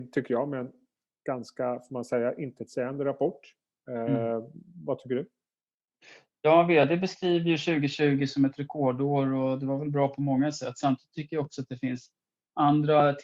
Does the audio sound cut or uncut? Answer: uncut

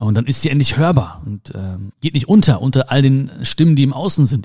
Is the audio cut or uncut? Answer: cut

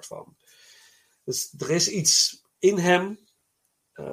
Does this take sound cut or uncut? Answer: uncut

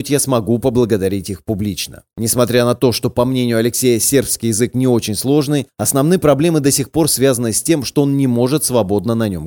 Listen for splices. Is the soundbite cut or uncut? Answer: uncut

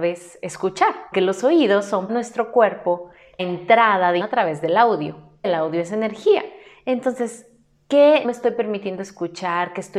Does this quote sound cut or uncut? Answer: cut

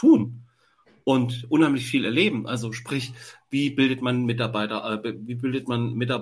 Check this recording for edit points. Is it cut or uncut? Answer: uncut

